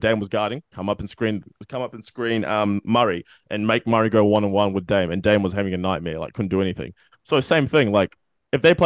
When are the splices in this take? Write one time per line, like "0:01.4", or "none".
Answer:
none